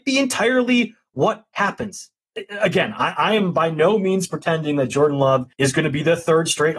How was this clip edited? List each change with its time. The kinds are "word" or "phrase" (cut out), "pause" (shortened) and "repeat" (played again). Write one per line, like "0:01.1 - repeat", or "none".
0:05.5 - pause